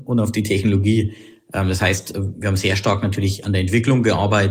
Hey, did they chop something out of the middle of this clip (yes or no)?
no